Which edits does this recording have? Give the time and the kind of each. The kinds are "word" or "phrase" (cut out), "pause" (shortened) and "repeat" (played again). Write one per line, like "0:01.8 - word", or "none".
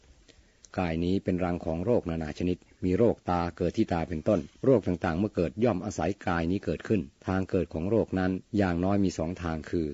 0:02.7 - pause
0:04.6 - pause
0:07.2 - pause
0:08.5 - pause